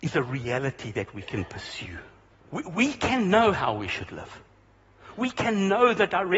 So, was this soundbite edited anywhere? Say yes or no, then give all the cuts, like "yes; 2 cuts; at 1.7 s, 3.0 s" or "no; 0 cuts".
yes; 1 cut; at 2.3 s